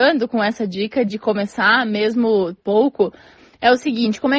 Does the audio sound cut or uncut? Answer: cut